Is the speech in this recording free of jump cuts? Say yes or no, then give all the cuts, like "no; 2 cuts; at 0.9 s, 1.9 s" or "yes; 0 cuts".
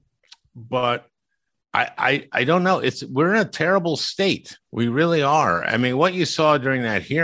no; 1 cut; at 4.6 s